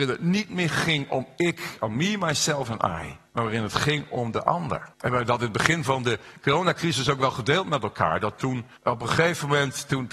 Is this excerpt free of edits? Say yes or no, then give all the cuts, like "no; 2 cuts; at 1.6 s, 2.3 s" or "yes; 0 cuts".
no; 3 cuts; at 3.3 s, 4.9 s, 8.8 s